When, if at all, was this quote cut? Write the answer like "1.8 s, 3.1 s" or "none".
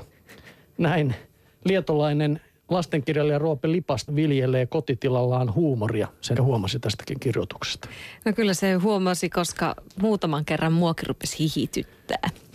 4.1 s, 6.4 s

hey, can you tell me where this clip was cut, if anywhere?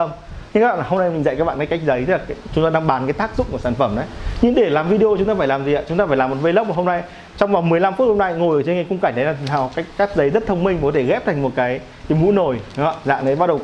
none

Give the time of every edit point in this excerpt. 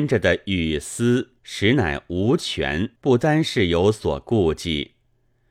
1.4 s, 3.0 s

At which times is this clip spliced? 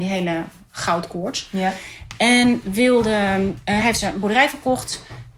none

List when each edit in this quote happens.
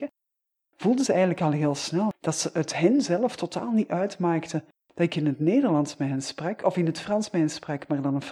none

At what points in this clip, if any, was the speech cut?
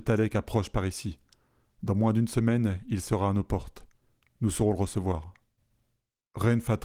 none

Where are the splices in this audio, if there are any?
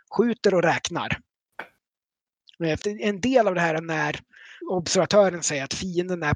2.8 s, 4.6 s

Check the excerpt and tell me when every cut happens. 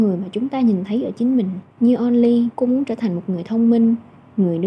1.7 s, 2.5 s

